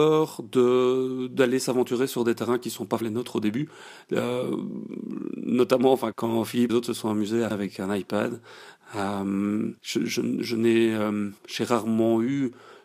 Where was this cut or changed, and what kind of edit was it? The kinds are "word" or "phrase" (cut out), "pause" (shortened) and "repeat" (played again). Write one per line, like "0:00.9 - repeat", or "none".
0:03.0 - word
0:06.1 - phrase
0:06.7 - phrase
0:07.5 - word
0:09.8 - pause
0:11.4 - pause